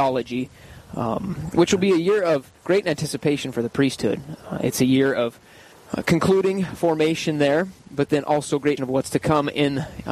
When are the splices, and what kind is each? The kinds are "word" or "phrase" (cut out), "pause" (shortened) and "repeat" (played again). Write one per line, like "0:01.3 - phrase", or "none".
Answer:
0:02.6 - pause
0:05.7 - pause
0:08.8 - word